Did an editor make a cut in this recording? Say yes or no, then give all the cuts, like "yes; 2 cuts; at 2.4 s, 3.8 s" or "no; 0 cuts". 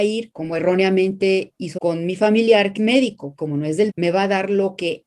yes; 4 cuts; at 1.8 s, 2.8 s, 3.4 s, 3.9 s